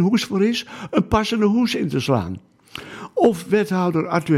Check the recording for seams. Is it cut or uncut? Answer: uncut